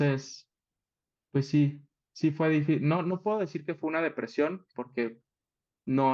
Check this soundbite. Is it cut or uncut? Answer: uncut